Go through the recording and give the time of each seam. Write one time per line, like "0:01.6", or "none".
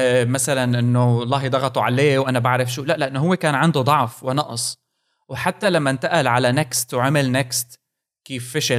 none

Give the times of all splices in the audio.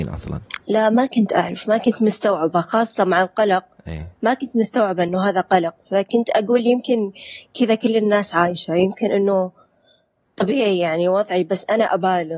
none

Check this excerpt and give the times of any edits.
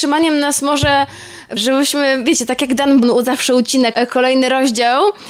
0:01.6
0:03.0
0:03.9

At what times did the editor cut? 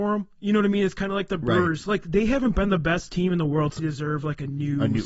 0:03.8

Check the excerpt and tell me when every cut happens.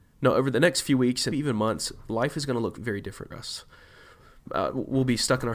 0:01.3
0:02.8
0:03.3

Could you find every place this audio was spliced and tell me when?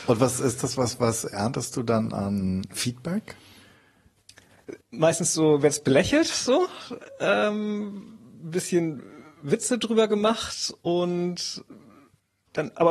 0:04.8
0:10.8

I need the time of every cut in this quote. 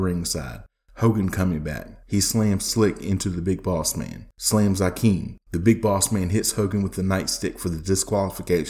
0:02.0
0:04.3
0:05.4

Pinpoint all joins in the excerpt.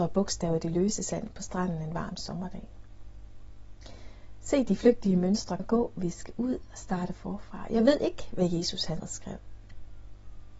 0:05.6
0:09.0

